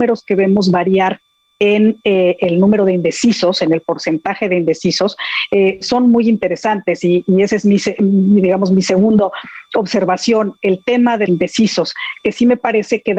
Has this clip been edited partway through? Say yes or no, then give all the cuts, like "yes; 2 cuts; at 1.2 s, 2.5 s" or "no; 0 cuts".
yes; 1 cut; at 11.3 s